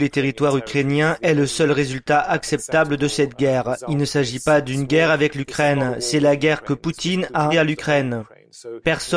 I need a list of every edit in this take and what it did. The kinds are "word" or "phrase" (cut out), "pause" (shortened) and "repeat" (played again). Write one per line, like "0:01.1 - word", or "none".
0:07.5 - word